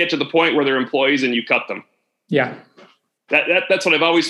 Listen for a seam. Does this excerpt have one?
no; 0 cuts

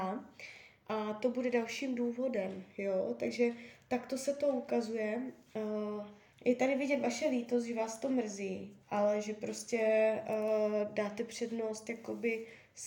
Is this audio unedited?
no; 2 cuts; at 6.3 s, 8.8 s

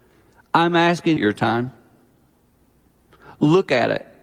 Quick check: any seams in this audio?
yes; 1 cut; at 1.2 s

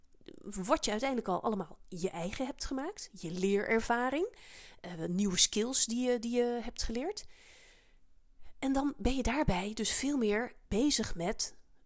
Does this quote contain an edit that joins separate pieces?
yes; 1 cut; at 10.7 s

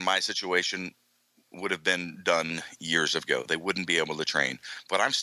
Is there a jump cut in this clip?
no; 0 cuts

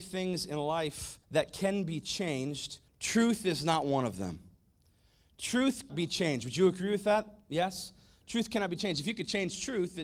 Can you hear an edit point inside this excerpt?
yes; 3 cuts; at 1.2 s, 2.9 s, 5.9 s

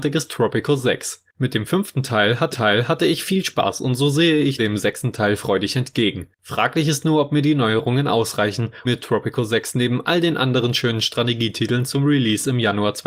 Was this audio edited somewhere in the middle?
yes; 5 cuts; at 1.3 s, 2.5 s, 4.6 s, 6.3 s, 8.8 s

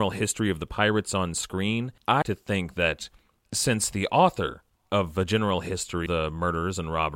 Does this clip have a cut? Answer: yes; 2 cuts; at 2.2 s, 6.1 s

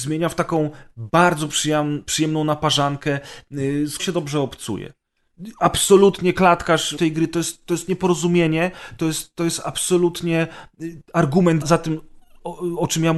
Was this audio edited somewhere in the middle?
yes; 3 cuts; at 4.0 s, 7.0 s, 11.6 s

